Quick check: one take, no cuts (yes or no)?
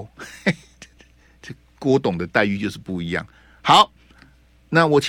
yes